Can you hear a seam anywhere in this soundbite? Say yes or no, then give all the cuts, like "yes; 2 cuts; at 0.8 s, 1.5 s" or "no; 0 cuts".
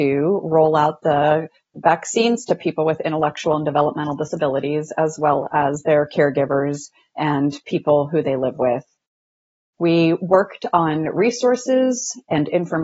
no; 0 cuts